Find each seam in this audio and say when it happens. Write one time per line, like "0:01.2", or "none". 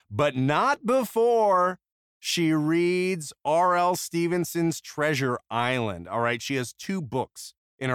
none